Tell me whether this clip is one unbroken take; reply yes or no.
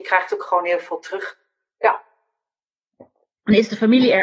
yes